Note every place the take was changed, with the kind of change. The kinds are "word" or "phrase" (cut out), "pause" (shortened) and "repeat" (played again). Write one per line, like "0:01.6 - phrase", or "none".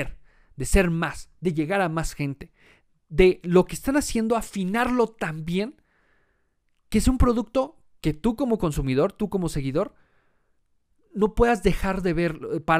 none

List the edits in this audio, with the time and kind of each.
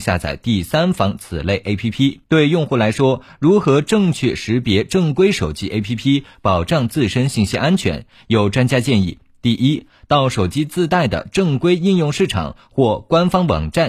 0:02.2 - pause

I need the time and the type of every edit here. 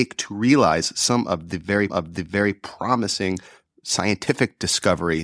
0:01.9 - repeat

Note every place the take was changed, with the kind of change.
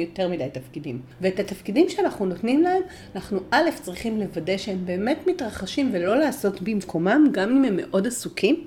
none

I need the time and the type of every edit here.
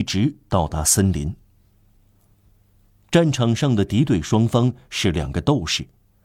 none

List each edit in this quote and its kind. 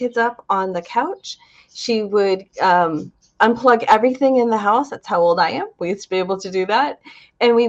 none

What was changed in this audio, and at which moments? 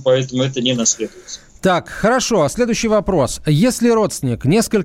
none

